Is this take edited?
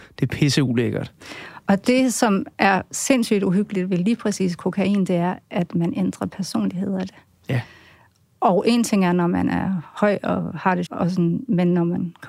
yes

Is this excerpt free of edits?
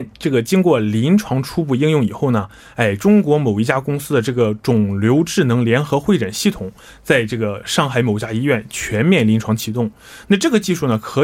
yes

